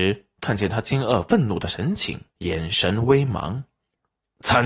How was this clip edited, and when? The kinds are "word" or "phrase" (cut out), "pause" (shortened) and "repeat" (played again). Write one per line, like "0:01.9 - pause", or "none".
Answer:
0:02.3 - pause